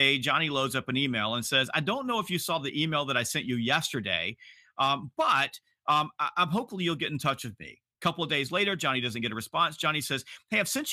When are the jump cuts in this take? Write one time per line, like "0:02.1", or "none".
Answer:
0:07.9

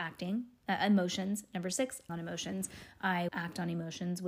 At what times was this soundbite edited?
0:02.1
0:03.3

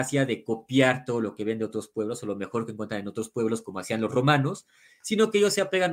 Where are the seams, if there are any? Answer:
none

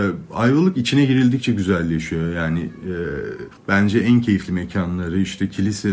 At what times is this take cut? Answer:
0:03.6

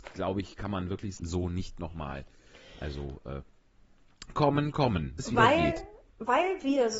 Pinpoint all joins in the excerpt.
0:01.2
0:04.3
0:05.2

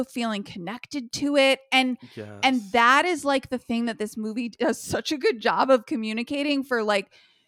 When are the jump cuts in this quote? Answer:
none

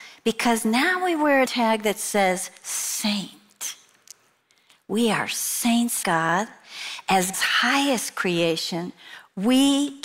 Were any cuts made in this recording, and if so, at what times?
0:01.5
0:06.0
0:07.3

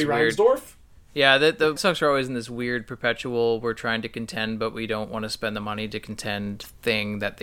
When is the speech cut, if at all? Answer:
0:01.8

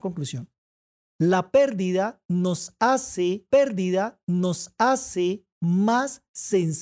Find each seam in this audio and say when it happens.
0:03.5

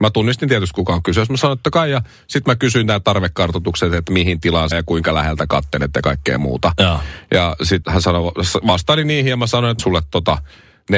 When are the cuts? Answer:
0:01.6
0:04.7
0:07.8
0:09.8

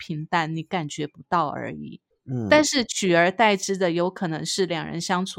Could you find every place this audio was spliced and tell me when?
0:02.1

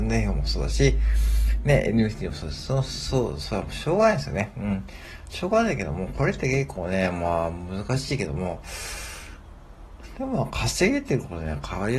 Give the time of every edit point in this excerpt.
none

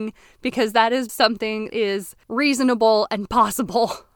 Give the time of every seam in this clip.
0:01.1
0:01.7
0:02.2

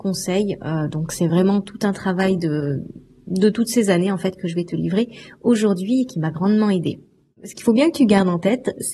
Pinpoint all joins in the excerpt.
none

